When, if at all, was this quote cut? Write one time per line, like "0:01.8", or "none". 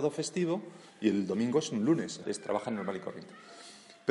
0:02.2